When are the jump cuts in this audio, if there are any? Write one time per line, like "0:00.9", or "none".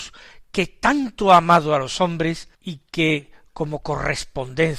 0:02.5